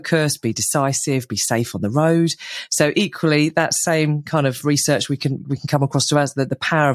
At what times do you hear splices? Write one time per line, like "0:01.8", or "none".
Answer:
none